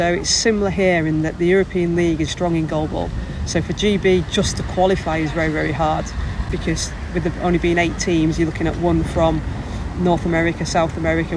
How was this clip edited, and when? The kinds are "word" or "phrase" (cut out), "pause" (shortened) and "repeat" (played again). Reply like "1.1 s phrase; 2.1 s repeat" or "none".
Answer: 2.3 s word